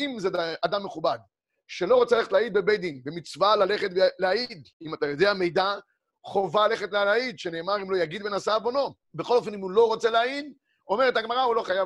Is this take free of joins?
no; 2 cuts; at 4.7 s, 9.0 s

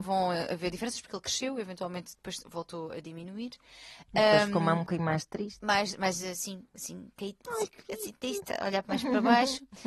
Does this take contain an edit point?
no; 0 cuts

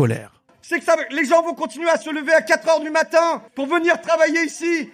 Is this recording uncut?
no; 1 cut; at 3.5 s

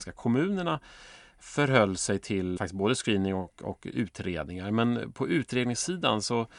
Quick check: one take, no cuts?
no; 1 cut; at 2.6 s

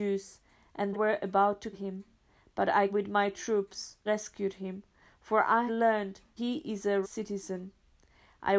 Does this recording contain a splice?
yes; 7 cuts; at 0.9 s, 1.7 s, 2.9 s, 4.1 s, 5.7 s, 6.4 s, 7.0 s

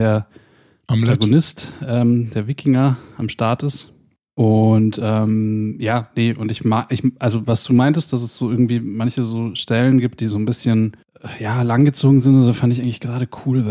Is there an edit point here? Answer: no; 0 cuts

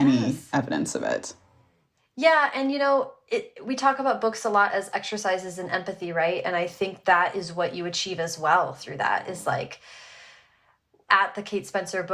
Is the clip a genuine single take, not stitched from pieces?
yes; 0 cuts

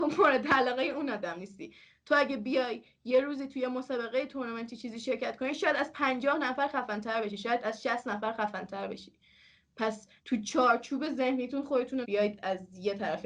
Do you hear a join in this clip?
yes; 2 cuts; at 10.2 s, 12.0 s

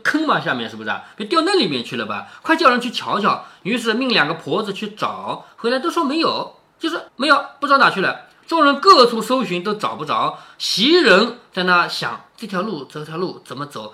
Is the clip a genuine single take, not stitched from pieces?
no; 1 cut; at 7.1 s

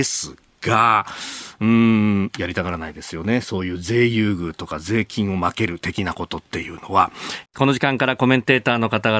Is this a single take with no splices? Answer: no; 1 cut; at 7.5 s

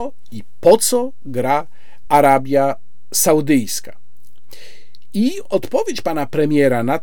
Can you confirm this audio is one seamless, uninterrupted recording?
yes; 0 cuts

